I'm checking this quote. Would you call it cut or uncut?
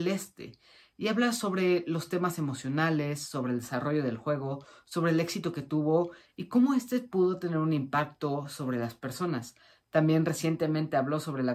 uncut